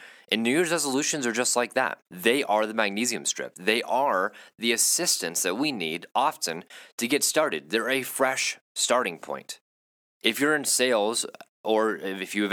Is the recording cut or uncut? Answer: cut